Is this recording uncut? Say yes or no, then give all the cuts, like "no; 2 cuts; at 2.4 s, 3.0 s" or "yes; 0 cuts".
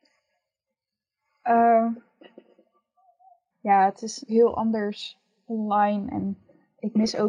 no; 2 cuts; at 3.5 s, 4.3 s